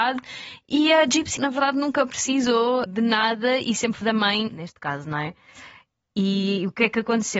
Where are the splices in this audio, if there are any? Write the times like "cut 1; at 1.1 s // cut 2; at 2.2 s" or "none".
cut 1; at 1.4 s // cut 2; at 2.9 s // cut 3; at 4.0 s // cut 4; at 4.5 s